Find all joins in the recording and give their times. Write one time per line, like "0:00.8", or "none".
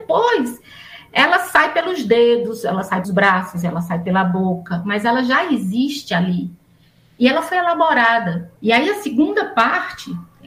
0:03.0
0:08.6